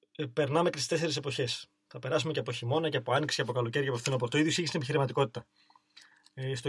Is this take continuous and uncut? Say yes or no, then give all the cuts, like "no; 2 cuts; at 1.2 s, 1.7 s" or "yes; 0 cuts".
yes; 0 cuts